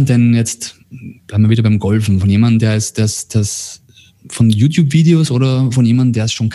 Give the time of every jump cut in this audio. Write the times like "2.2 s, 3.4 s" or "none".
none